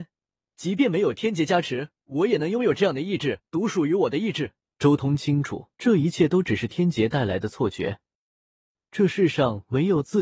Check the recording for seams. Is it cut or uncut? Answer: cut